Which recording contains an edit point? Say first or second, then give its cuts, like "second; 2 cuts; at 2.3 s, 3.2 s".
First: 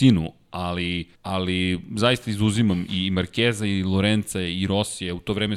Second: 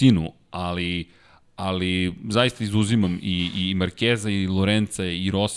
first; 2 cuts; at 1.1 s, 2.9 s